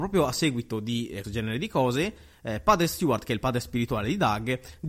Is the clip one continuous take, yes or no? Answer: no